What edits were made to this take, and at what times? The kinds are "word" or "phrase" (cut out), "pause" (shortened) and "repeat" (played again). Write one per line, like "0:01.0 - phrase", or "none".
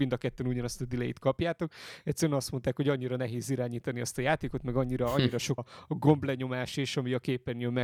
0:05.6 - word